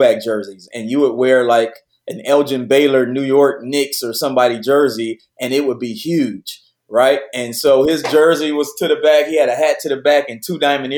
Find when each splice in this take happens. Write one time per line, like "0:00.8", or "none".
none